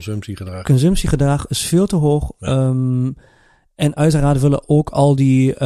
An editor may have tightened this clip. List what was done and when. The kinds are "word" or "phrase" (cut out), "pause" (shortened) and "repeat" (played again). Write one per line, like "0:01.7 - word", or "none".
none